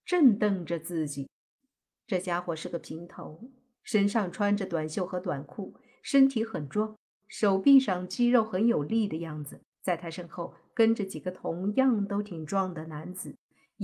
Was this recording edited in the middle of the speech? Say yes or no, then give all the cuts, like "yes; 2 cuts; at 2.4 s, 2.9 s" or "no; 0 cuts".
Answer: yes; 1 cut; at 9.7 s